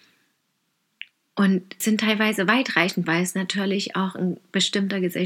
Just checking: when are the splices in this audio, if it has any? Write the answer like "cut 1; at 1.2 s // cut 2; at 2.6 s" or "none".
cut 1; at 1.8 s // cut 2; at 3.0 s